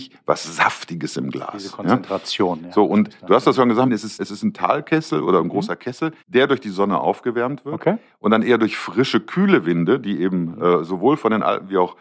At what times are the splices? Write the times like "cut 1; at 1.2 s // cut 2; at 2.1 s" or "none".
cut 1; at 3.5 s // cut 2; at 3.9 s // cut 3; at 4.2 s // cut 4; at 6.2 s